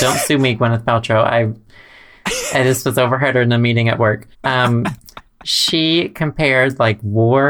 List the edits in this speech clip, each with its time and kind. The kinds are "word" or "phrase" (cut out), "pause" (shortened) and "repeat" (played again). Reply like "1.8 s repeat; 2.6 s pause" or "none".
4.3 s pause